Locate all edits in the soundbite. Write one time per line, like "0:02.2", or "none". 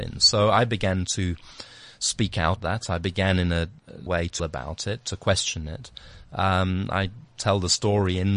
0:02.6
0:04.1
0:04.4